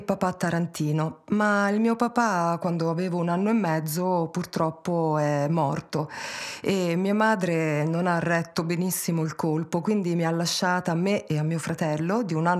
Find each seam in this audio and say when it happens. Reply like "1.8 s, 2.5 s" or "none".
none